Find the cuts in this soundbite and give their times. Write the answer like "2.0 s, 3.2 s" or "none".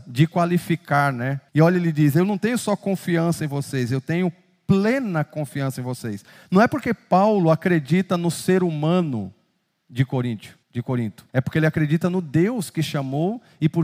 1.5 s, 10.6 s, 11.3 s